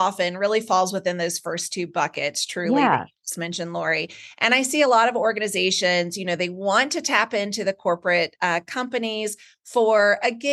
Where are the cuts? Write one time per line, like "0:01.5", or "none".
none